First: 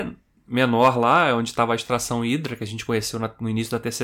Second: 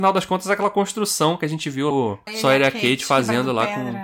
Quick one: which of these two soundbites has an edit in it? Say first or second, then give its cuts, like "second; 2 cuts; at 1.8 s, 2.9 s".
second; 2 cuts; at 1.9 s, 2.3 s